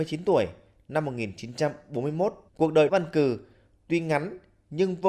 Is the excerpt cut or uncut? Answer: cut